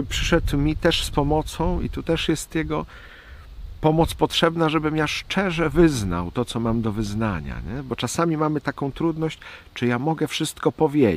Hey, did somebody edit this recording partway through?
no; 0 cuts

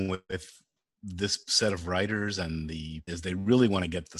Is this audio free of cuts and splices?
no; 1 cut; at 3.1 s

